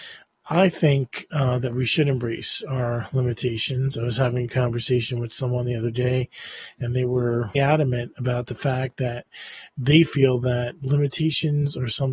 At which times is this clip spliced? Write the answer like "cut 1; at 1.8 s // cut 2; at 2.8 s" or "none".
cut 1; at 7.6 s